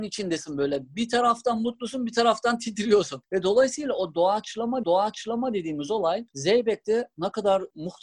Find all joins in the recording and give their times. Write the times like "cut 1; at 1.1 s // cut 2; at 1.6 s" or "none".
cut 1; at 4.8 s